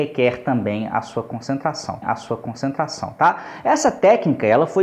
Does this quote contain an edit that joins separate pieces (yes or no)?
yes